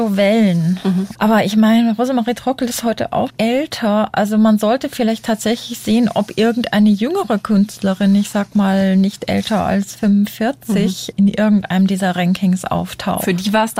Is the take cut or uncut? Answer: cut